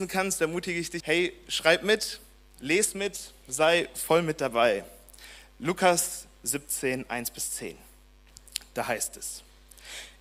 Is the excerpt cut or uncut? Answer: cut